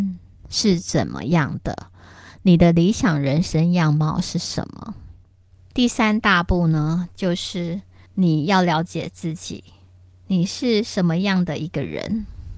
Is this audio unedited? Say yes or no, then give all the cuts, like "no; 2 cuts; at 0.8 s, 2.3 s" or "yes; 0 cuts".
yes; 0 cuts